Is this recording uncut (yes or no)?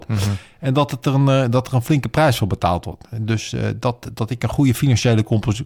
yes